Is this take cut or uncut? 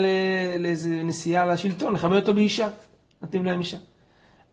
uncut